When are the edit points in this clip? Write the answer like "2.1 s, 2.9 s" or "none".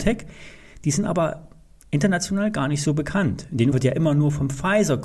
3.7 s